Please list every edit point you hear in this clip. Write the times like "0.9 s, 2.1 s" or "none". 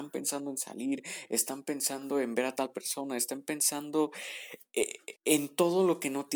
5.2 s